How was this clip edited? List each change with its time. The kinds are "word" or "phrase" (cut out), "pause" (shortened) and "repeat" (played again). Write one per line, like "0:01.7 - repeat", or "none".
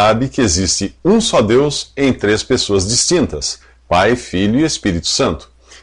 none